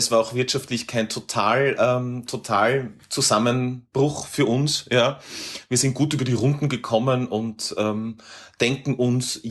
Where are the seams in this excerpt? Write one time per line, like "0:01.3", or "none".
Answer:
none